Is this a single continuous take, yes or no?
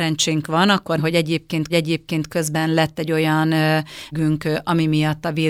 no